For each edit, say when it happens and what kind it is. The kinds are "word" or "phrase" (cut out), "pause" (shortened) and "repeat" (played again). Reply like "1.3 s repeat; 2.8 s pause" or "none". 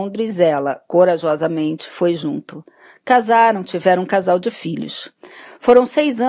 none